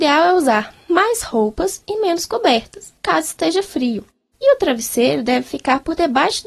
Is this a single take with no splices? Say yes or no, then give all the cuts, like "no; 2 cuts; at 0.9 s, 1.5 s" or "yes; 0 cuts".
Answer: no; 1 cut; at 3.0 s